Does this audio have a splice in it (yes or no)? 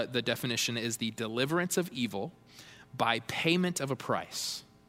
no